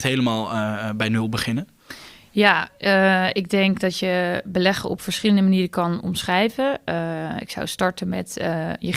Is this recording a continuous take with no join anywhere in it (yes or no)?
yes